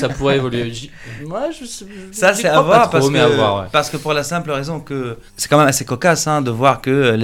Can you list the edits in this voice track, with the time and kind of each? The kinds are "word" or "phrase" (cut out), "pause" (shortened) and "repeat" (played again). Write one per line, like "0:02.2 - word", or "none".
0:05.3 - pause